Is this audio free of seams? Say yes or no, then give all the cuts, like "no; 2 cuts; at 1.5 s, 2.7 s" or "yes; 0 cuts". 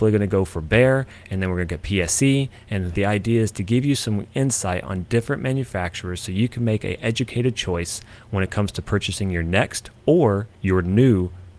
no; 1 cut; at 2.9 s